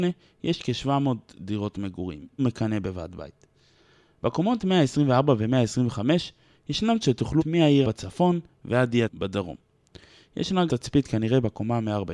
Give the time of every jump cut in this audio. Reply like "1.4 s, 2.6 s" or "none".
2.4 s, 7.0 s, 7.4 s, 7.8 s, 9.1 s, 10.7 s

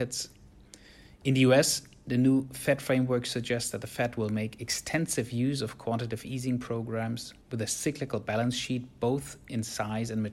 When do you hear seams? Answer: 7.4 s

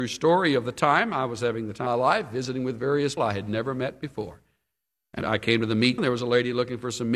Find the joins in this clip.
1.9 s, 3.2 s, 6.0 s

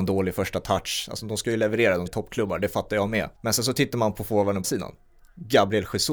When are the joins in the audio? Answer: 2.1 s, 3.4 s, 4.6 s

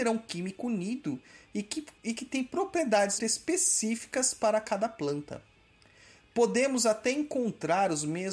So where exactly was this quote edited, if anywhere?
2.0 s, 3.2 s

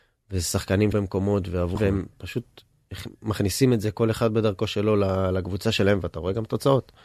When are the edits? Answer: 0.9 s, 1.8 s

